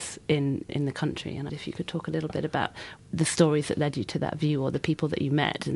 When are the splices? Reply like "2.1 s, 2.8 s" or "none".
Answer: 1.5 s

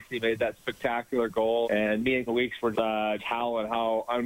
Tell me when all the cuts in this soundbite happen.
1.6 s, 2.3 s, 2.7 s, 3.2 s

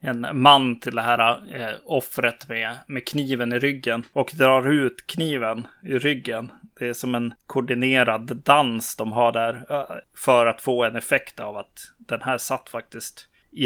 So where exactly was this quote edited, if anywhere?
none

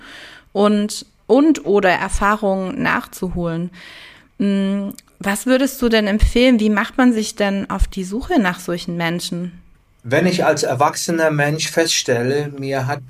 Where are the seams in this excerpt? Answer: 9.7 s

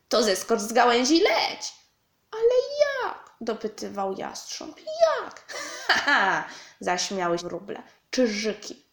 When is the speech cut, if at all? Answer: 6.0 s, 7.4 s

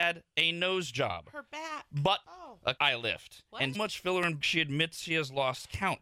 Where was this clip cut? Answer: 2.2 s, 2.8 s, 3.7 s, 4.4 s

